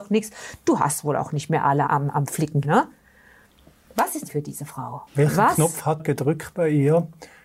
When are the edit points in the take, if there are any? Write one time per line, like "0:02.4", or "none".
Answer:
0:01.9
0:02.6
0:04.3
0:05.1
0:06.0